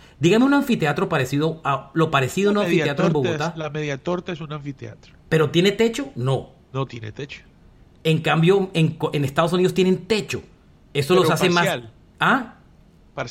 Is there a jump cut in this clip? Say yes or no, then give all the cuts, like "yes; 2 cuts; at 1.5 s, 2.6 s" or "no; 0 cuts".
no; 0 cuts